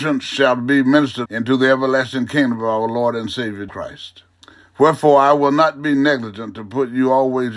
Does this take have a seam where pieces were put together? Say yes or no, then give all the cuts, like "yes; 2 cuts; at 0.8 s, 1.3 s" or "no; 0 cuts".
yes; 3 cuts; at 1.2 s, 3.7 s, 4.4 s